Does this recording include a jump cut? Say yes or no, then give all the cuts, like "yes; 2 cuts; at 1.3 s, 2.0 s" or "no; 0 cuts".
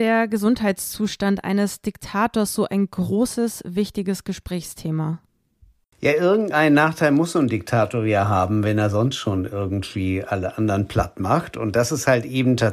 no; 0 cuts